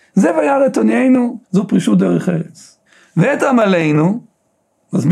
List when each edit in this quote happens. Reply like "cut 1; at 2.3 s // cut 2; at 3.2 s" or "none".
cut 1; at 1.4 s // cut 2; at 2.9 s